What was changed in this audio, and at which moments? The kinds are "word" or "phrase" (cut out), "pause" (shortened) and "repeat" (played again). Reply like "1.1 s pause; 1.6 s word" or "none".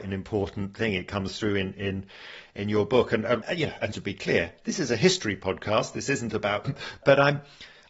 3.9 s word; 6.6 s phrase